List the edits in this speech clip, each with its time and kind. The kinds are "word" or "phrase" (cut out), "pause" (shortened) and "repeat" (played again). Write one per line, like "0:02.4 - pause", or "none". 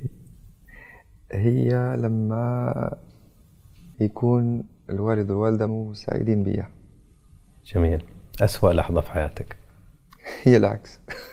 0:03.9 - pause
0:05.7 - word